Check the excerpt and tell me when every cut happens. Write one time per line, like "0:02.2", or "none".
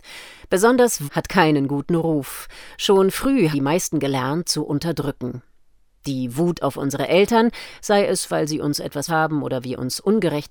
0:01.1
0:03.5
0:04.4
0:09.1